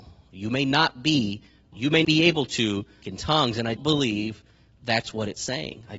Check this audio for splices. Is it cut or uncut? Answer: cut